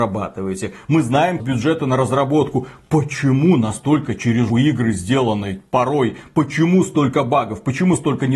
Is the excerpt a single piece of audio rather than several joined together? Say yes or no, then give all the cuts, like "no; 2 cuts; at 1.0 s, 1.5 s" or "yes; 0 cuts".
no; 2 cuts; at 1.4 s, 4.5 s